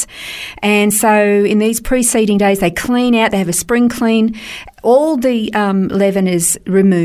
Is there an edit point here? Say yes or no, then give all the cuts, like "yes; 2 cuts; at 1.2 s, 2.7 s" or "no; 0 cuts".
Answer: no; 0 cuts